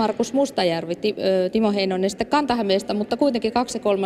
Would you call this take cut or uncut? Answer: uncut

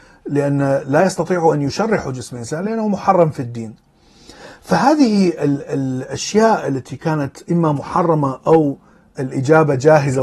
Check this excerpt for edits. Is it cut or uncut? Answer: uncut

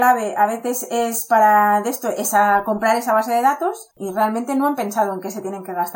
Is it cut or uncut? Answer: cut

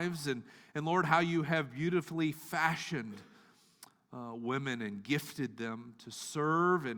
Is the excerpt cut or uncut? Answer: uncut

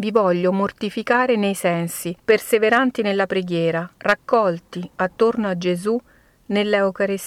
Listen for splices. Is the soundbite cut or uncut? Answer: cut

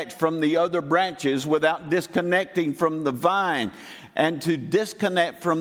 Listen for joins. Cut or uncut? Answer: uncut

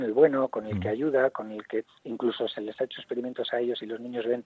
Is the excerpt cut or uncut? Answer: uncut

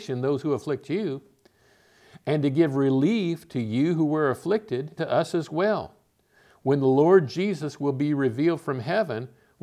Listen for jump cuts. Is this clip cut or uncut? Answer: cut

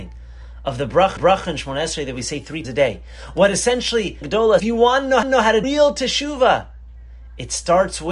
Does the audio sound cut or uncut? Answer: cut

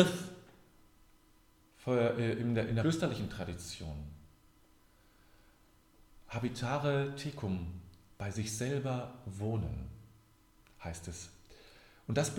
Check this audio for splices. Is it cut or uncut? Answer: cut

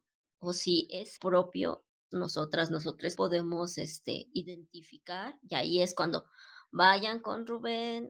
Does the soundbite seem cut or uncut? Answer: cut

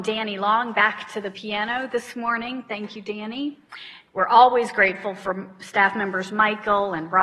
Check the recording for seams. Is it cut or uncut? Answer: uncut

